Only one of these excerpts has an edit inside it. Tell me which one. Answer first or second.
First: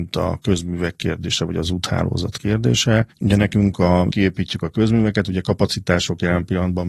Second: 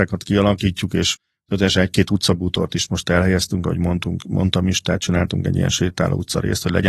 first